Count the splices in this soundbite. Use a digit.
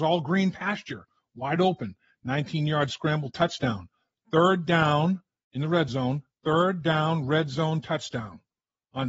0